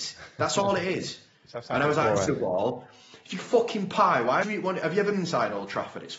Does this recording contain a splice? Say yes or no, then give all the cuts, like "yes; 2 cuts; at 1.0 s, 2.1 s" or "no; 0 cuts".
yes; 4 cuts; at 2.3 s, 3.4 s, 4.4 s, 5.1 s